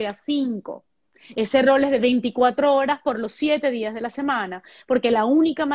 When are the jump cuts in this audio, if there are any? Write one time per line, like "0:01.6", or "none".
none